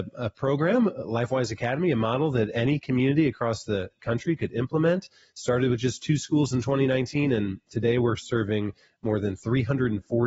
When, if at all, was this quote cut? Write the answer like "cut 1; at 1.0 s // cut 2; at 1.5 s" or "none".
none